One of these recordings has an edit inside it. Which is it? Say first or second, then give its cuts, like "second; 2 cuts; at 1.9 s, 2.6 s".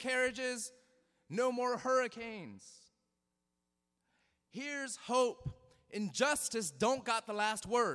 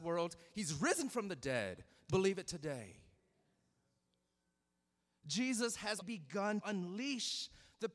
second; 3 cuts; at 2.1 s, 6.0 s, 6.6 s